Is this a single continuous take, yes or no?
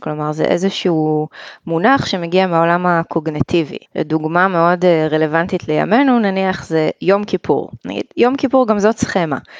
no